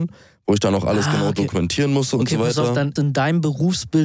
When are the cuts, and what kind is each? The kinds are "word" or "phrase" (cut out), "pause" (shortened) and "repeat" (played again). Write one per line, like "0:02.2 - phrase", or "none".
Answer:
0:03.0 - phrase